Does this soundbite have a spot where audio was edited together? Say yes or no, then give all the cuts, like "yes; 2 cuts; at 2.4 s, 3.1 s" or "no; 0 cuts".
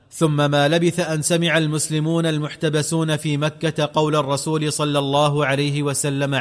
no; 0 cuts